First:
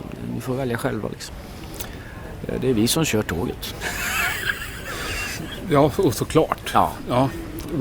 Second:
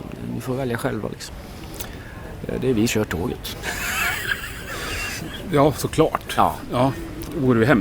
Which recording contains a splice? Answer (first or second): second